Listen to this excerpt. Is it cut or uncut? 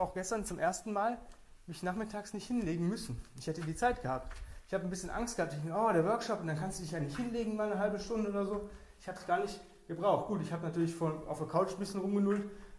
uncut